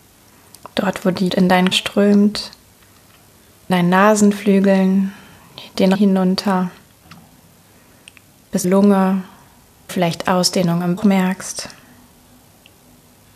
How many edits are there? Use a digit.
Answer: 7